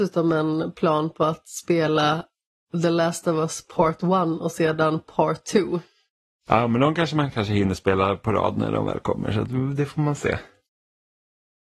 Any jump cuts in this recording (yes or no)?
no